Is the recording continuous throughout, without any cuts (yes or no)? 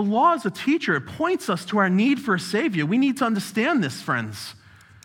yes